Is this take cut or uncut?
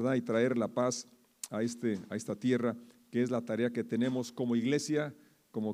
uncut